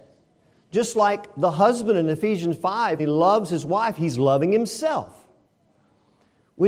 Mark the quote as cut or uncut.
cut